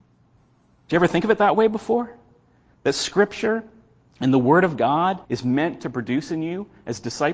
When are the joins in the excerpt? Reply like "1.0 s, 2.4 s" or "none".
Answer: 5.2 s